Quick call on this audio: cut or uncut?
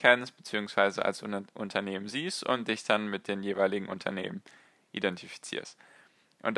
uncut